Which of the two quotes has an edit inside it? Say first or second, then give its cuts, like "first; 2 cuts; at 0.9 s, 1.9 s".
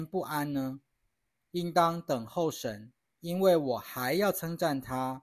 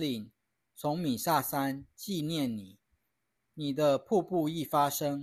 first; 1 cut; at 3.1 s